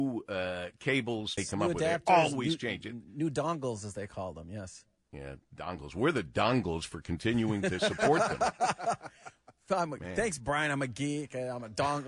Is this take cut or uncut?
cut